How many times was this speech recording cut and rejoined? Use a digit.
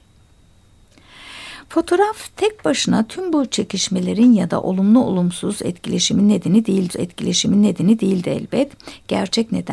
1